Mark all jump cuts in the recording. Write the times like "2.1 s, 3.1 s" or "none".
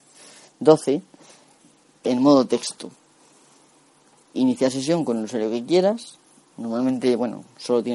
2.0 s, 4.3 s

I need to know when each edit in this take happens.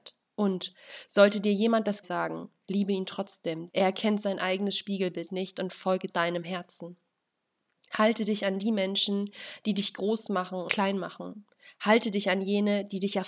2.0 s, 3.7 s, 6.1 s, 10.7 s

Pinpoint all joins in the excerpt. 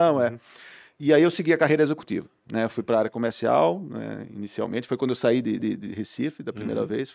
5.6 s

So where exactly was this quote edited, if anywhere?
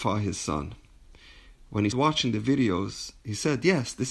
1.9 s

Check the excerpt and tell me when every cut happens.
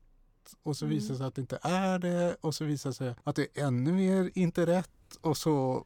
3.2 s

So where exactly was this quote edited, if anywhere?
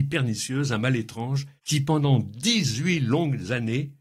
1.6 s

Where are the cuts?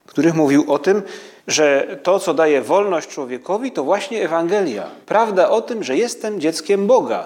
1.4 s, 5.0 s

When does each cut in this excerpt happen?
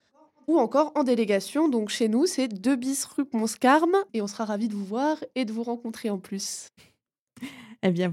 4.1 s

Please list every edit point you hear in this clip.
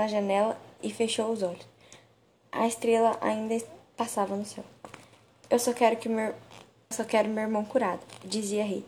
6.9 s

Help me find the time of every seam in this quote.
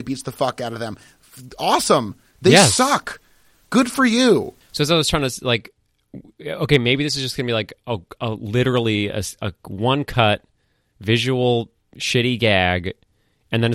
none

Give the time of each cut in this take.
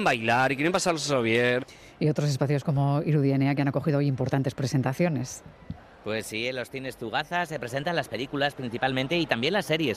none

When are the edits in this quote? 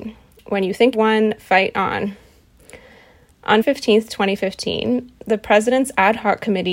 0.9 s, 3.6 s

